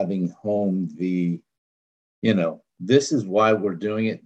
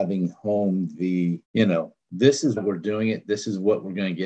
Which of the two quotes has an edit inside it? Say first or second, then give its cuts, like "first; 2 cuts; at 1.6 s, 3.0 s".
second; 2 cuts; at 1.4 s, 2.6 s